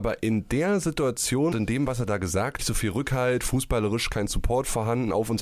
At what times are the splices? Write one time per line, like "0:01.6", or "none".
0:01.5
0:02.6